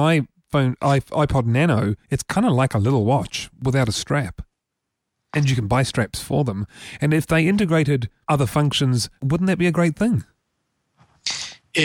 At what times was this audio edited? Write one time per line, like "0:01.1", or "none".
0:02.0